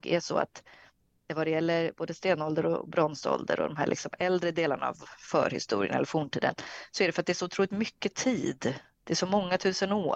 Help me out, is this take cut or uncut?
uncut